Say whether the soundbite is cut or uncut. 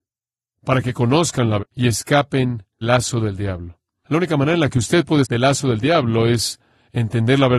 cut